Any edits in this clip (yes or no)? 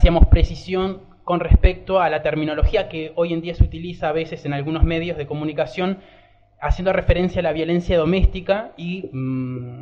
no